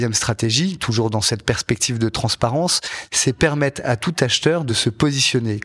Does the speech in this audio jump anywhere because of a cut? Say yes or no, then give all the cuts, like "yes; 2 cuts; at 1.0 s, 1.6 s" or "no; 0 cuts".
no; 0 cuts